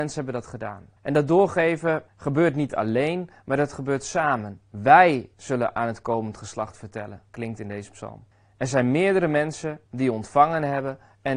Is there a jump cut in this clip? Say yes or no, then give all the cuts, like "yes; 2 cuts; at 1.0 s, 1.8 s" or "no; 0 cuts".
yes; 6 cuts; at 1.0 s, 2.1 s, 5.3 s, 7.3 s, 8.3 s, 9.9 s